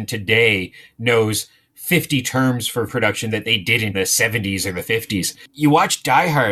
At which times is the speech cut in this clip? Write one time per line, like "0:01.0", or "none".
0:02.9
0:03.9

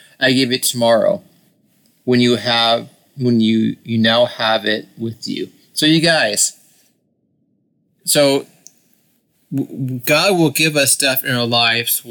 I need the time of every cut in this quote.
none

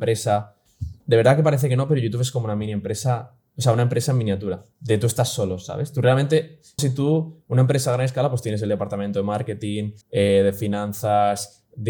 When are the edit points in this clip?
0:01.0
0:04.7
0:06.8
0:10.0

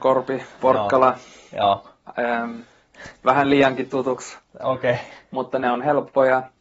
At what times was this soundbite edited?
none

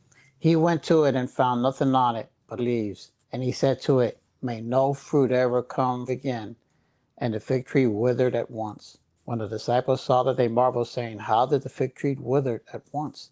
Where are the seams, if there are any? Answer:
0:02.6
0:03.2
0:06.1
0:09.2

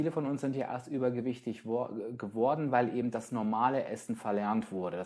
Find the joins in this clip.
none

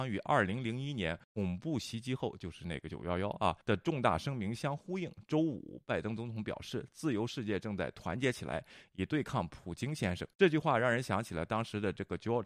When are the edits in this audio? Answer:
0:01.2
0:03.6
0:10.3

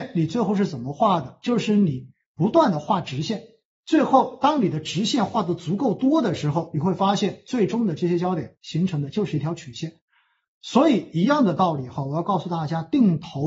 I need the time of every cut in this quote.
none

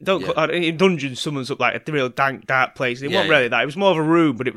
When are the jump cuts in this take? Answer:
none

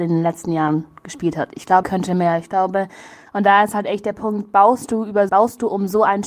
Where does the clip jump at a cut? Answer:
0:01.8
0:05.3

